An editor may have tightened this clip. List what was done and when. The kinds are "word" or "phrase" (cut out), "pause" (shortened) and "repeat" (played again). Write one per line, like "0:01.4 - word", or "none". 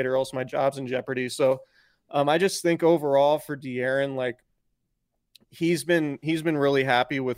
none